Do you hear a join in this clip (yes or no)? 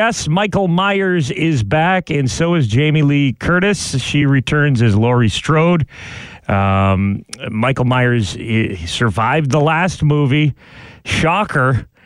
no